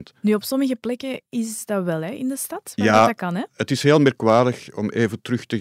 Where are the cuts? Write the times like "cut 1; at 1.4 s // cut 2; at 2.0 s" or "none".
none